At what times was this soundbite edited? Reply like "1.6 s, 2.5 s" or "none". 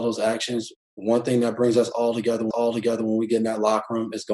2.5 s

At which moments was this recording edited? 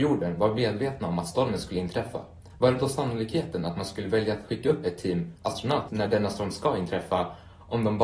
5.9 s

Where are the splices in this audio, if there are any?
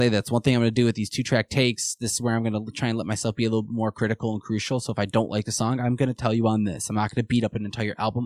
none

